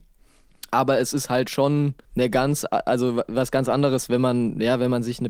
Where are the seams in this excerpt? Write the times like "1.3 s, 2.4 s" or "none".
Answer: 2.0 s